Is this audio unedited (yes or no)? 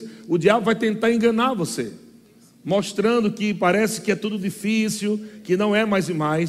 yes